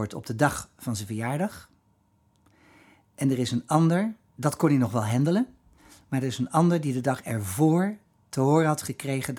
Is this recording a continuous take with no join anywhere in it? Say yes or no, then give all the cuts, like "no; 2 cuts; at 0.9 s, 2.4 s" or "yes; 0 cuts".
yes; 0 cuts